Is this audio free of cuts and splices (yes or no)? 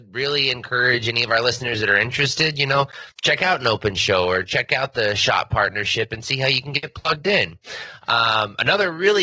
no